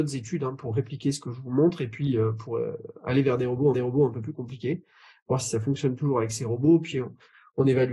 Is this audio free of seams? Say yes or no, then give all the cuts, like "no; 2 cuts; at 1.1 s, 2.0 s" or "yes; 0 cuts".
no; 1 cut; at 3.7 s